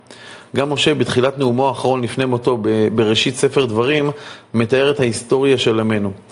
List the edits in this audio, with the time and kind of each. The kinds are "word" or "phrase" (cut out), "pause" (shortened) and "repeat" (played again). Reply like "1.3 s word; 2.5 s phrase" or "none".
none